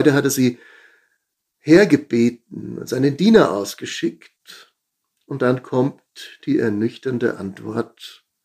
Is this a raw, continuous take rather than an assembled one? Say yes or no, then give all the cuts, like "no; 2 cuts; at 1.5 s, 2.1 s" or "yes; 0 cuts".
yes; 0 cuts